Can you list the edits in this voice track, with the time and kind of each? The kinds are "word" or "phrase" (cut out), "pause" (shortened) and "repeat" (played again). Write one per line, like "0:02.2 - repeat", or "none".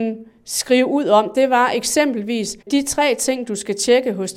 0:02.6 - pause